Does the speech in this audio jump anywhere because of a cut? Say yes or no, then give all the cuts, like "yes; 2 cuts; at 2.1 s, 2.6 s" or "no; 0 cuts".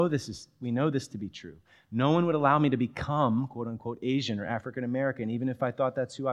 no; 0 cuts